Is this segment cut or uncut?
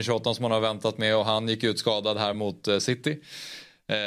uncut